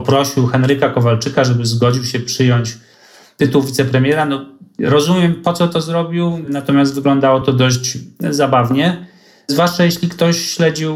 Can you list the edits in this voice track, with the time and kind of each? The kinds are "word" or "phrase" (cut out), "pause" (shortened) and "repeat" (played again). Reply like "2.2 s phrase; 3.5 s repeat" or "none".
none